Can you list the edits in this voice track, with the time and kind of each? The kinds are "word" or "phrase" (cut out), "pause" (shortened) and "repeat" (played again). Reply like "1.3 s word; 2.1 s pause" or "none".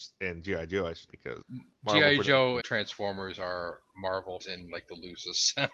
1.1 s word; 1.4 s word; 2.6 s word; 4.4 s word